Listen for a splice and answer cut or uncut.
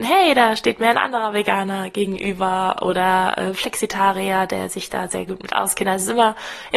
uncut